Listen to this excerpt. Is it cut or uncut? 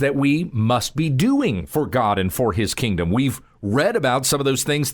uncut